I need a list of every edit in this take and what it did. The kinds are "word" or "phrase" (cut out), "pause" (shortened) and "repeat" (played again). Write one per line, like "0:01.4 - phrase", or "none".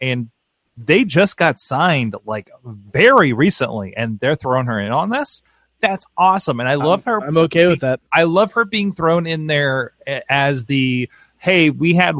0:08.0 - pause

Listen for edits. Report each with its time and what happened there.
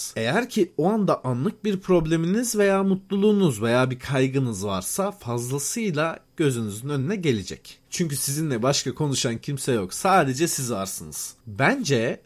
none

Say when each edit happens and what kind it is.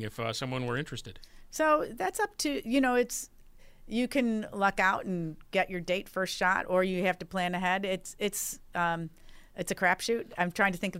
0:09.5 - pause

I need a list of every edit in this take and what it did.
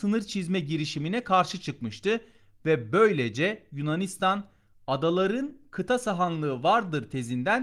none

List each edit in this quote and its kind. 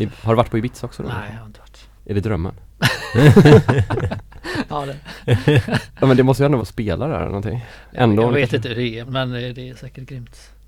0:02.0 - pause
0:02.7 - pause
0:04.7 - word
0:06.6 - phrase
0:09.1 - word

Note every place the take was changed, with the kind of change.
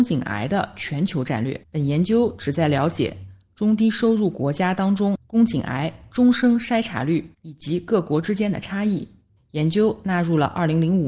0:01.6 - pause
0:05.2 - pause
0:07.3 - pause
0:09.4 - pause

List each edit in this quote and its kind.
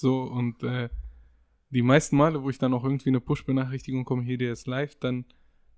none

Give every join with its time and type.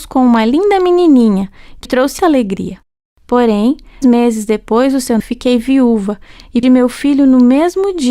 0:01.9 - word
0:02.2 - word
0:04.0 - word
0:05.2 - word
0:06.6 - word

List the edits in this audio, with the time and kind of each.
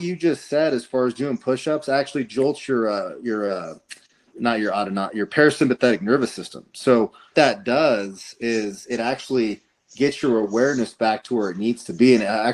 0:04.3 - word
0:07.3 - word

